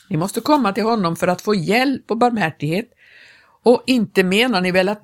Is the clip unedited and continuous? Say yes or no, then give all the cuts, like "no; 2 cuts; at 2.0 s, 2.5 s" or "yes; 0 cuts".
yes; 0 cuts